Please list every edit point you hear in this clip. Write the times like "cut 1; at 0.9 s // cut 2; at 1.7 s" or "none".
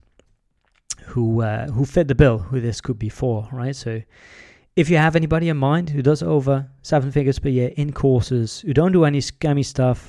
none